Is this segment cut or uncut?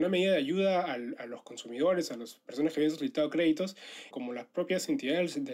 cut